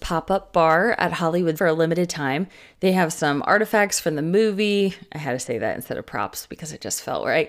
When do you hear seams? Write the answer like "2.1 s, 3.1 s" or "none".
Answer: 1.6 s